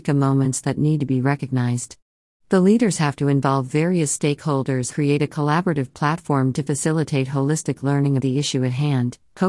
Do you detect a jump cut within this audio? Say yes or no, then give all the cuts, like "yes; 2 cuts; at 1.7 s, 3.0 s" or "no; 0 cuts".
yes; 2 cuts; at 4.9 s, 8.2 s